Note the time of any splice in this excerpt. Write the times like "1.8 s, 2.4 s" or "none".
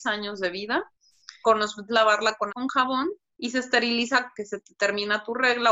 1.4 s, 1.9 s, 2.5 s, 3.3 s, 4.3 s

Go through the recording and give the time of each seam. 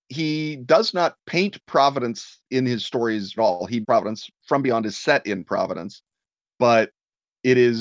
2.5 s, 3.4 s, 3.8 s

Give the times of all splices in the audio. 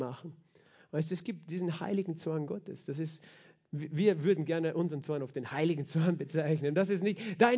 none

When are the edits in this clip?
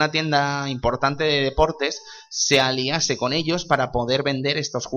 none

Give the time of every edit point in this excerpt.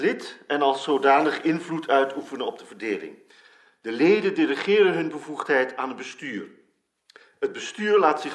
none

